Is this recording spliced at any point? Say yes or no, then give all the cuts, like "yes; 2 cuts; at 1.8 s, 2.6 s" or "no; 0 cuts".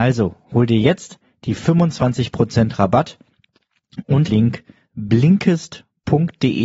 yes; 1 cut; at 4.3 s